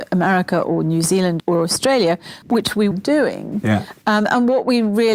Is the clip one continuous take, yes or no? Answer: no